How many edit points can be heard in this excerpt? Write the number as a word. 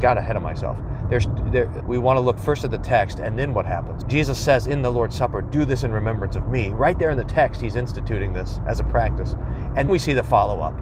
three